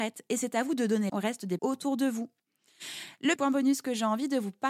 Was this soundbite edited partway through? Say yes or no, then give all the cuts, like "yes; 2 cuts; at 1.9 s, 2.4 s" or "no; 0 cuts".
yes; 3 cuts; at 1.1 s, 1.6 s, 3.4 s